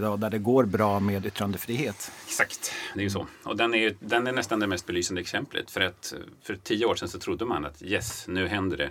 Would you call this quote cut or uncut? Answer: cut